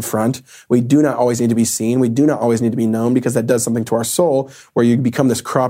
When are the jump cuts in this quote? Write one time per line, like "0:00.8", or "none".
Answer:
none